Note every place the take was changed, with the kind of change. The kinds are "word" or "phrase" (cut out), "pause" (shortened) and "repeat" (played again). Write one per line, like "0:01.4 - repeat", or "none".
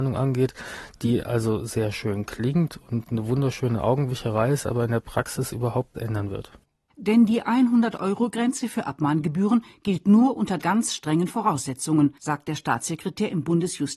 0:05.9 - word
0:10.6 - word
0:12.2 - pause